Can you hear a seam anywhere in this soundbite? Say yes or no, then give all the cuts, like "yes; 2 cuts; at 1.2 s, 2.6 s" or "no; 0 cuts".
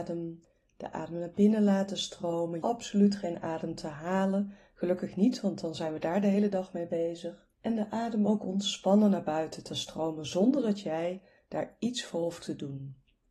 yes; 3 cuts; at 2.6 s, 7.5 s, 9.7 s